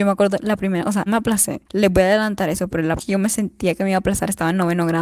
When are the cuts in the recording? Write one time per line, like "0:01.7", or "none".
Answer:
0:01.1
0:01.7
0:03.0